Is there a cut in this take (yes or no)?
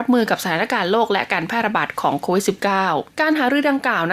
yes